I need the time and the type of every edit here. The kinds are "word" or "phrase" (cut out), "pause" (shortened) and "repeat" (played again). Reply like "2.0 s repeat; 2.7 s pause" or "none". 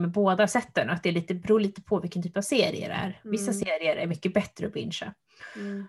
none